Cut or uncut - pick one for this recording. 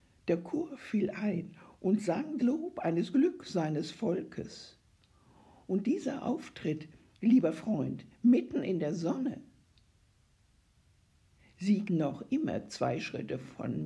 cut